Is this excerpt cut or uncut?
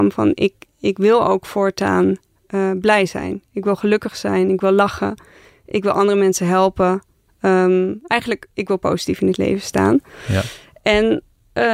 uncut